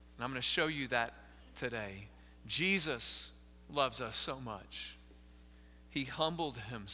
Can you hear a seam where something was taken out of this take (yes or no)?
yes